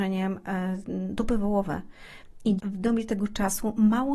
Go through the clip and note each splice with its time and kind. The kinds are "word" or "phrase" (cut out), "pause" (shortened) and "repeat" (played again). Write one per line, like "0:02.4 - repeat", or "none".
0:02.6 - word